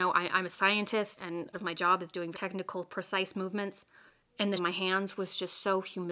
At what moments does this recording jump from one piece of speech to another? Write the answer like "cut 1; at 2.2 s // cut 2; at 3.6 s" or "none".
cut 1; at 1.2 s // cut 2; at 1.5 s // cut 3; at 2.3 s // cut 4; at 4.1 s // cut 5; at 4.6 s